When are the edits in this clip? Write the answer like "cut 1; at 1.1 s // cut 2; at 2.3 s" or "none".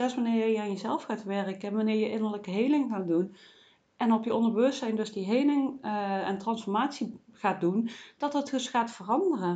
none